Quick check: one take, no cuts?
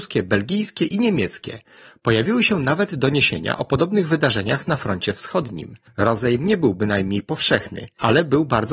yes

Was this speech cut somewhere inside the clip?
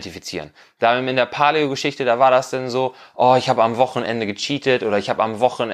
no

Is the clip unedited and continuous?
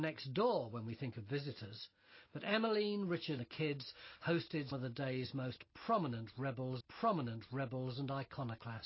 no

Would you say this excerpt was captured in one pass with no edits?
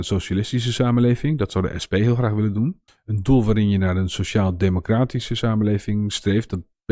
no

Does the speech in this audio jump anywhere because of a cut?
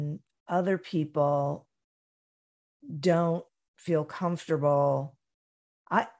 no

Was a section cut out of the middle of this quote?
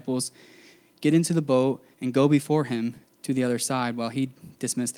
yes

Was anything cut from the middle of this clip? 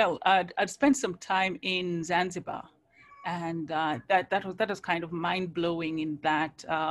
no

